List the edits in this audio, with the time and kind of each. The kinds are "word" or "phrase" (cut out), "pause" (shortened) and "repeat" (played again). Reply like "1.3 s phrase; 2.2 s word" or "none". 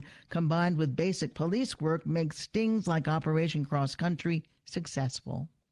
none

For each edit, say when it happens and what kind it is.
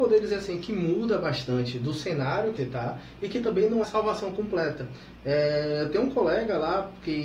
2.6 s word; 3.8 s phrase

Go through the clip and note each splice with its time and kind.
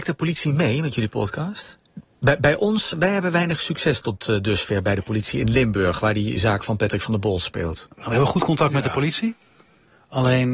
2.9 s word

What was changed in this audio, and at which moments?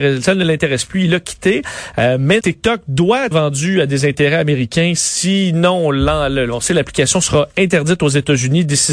2.4 s word; 3.3 s word

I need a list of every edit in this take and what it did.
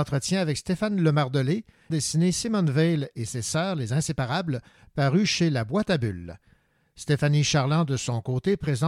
1.9 s phrase

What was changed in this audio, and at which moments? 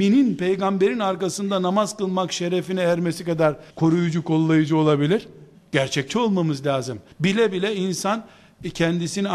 3.7 s pause; 5.5 s pause; 7.1 s pause

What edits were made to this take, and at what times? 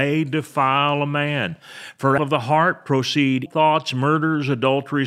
2.2 s word; 3.5 s word

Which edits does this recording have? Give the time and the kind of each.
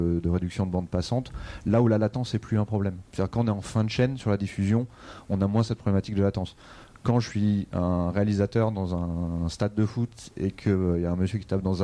3.1 s pause

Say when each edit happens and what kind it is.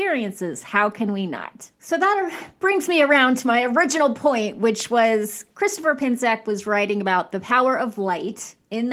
1.7 s pause; 5.5 s pause

